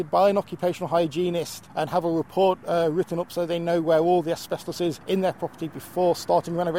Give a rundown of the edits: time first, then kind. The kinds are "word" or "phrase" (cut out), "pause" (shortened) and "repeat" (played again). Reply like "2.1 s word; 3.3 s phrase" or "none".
1.7 s pause; 5.0 s pause